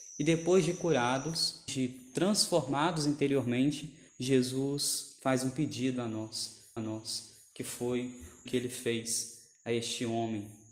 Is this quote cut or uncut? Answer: cut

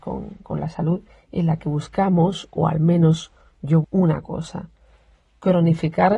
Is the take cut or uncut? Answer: cut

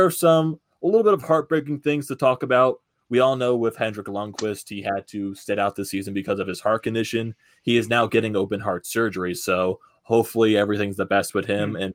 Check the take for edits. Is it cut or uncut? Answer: uncut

